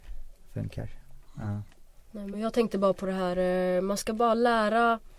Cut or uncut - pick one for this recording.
uncut